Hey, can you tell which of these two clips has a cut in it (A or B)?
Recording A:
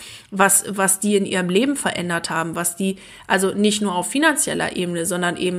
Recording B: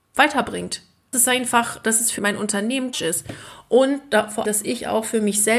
B